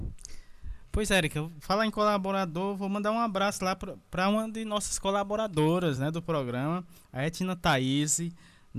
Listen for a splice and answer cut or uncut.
uncut